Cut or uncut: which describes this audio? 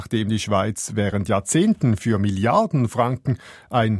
cut